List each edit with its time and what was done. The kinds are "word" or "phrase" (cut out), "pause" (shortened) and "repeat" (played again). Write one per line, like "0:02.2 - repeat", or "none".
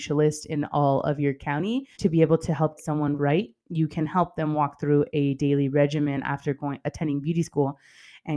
0:01.9 - pause
0:02.8 - word
0:03.2 - word